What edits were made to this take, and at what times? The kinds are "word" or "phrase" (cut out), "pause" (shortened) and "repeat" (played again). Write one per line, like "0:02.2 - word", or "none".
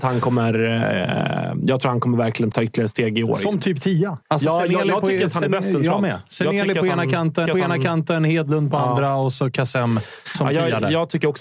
0:02.5 - word
0:04.2 - pause
0:07.5 - repeat